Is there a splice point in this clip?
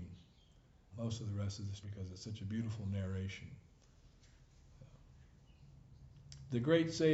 yes; 2 cuts; at 0.9 s, 1.8 s

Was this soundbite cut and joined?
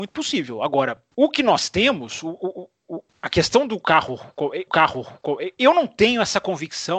yes; 3 cuts; at 1.1 s, 3.1 s, 4.7 s

